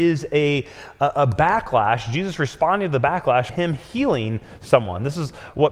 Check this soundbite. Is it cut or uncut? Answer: cut